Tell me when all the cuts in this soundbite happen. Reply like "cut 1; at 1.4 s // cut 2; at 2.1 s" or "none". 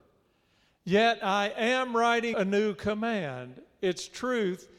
cut 1; at 2.3 s